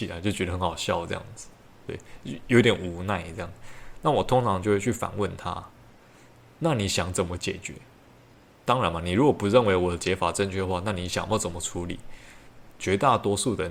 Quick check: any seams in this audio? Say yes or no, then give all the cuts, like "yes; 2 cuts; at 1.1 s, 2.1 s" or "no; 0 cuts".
no; 0 cuts